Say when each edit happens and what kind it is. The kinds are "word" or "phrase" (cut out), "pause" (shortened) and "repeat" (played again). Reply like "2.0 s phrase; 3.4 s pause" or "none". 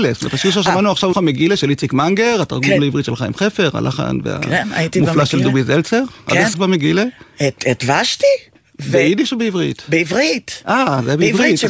1.1 s word; 6.5 s word